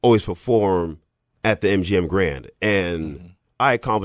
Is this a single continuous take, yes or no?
yes